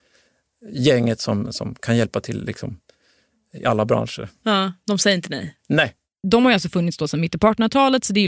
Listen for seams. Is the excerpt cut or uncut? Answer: uncut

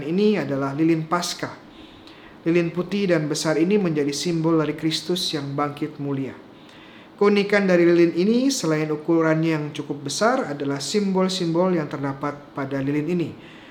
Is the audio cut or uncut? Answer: uncut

